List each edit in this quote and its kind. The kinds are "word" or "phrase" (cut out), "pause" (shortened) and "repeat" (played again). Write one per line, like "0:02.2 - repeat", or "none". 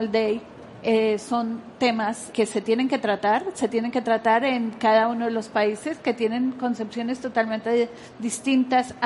0:02.3 - word